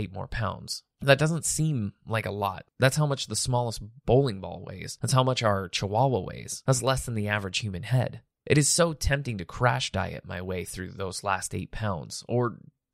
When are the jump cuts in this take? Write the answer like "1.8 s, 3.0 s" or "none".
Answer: none